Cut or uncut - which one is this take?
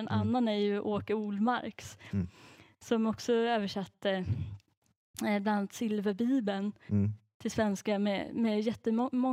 uncut